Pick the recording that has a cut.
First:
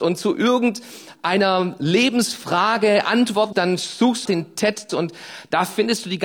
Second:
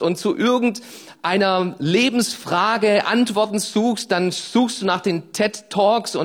first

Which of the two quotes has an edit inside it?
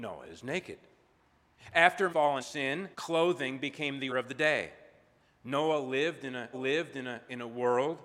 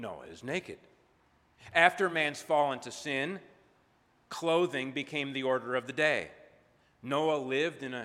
first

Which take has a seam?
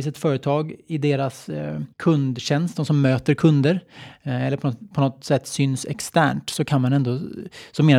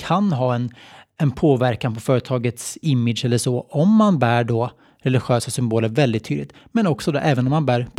first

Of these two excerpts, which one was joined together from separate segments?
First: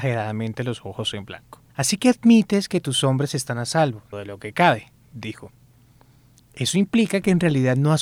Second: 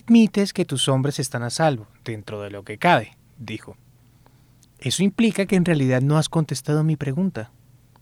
first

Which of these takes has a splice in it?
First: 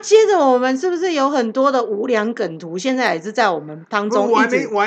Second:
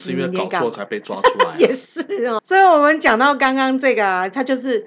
second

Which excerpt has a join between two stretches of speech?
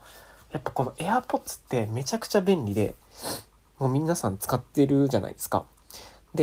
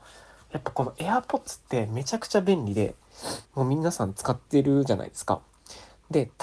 second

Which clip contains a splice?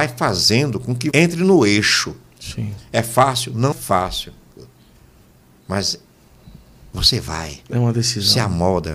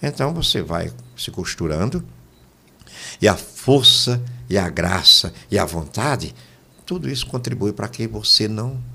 first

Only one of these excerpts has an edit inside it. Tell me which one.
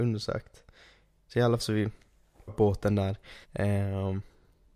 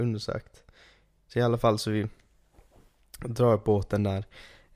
first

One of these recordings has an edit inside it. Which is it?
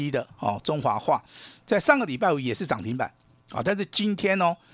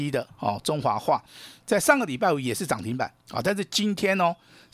second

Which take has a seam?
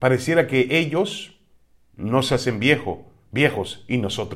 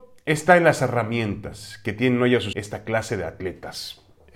second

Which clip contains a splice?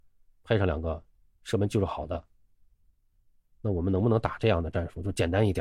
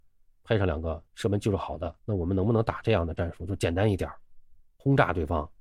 second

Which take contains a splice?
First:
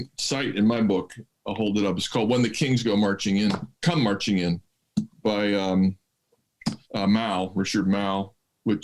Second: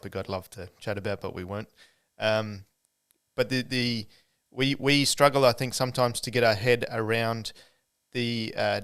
first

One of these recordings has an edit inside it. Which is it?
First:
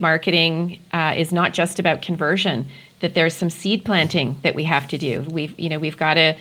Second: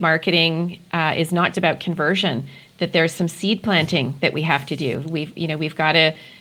second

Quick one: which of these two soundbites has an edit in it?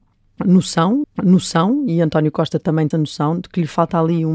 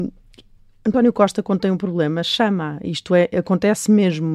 first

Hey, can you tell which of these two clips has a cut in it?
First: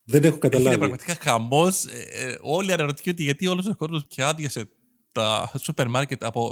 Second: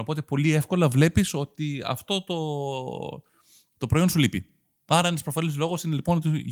first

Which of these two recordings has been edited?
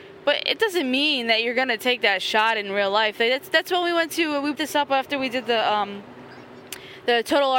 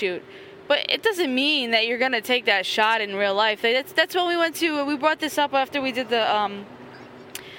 first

